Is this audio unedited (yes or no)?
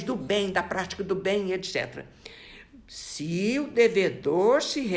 yes